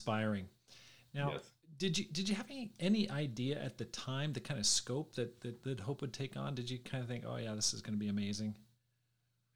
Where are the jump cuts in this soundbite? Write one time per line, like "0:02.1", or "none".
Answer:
none